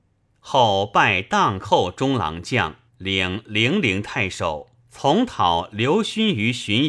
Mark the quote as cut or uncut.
cut